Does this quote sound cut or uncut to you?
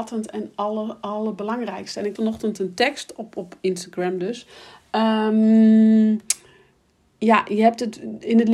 cut